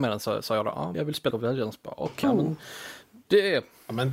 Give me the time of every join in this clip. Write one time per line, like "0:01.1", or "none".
0:00.9
0:01.3
0:02.2